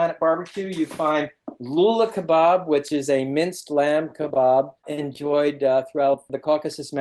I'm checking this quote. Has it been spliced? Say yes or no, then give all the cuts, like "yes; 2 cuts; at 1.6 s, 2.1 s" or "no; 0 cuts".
yes; 1 cut; at 4.8 s